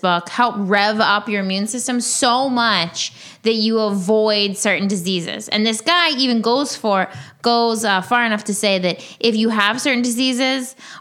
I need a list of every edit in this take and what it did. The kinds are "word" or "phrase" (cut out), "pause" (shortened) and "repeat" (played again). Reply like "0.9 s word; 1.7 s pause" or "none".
none